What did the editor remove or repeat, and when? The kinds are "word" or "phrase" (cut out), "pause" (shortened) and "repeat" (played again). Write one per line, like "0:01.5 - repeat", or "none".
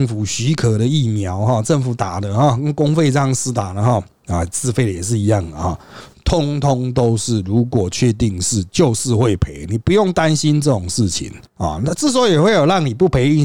0:11.5 - pause